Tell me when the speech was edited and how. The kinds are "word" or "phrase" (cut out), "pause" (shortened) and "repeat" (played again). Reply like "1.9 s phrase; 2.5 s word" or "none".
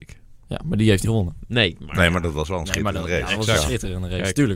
1.0 s word